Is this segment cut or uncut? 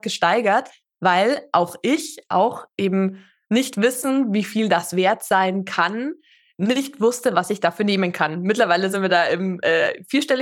uncut